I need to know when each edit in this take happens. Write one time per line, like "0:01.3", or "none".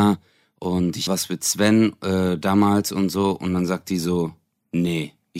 0:01.1